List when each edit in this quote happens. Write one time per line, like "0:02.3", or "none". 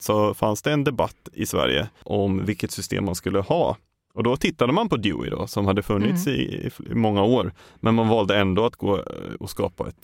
none

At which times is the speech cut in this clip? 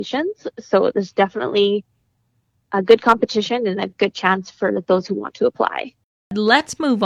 none

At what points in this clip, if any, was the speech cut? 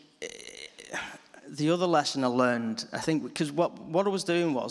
none

